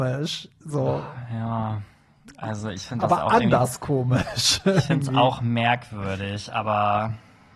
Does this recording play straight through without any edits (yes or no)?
yes